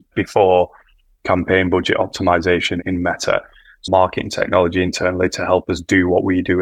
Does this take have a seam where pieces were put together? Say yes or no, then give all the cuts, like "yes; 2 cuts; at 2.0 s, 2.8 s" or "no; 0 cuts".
yes; 1 cut; at 3.9 s